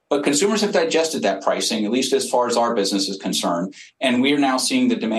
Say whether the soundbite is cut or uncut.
uncut